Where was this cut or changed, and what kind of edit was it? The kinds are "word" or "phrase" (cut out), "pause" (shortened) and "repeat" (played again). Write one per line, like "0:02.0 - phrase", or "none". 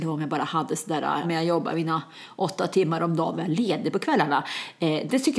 0:01.2 - word
0:03.3 - phrase